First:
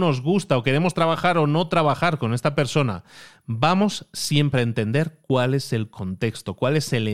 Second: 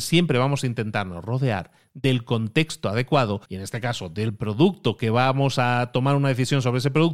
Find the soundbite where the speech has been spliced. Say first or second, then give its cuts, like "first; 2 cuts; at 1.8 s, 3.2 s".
second; 1 cut; at 3.4 s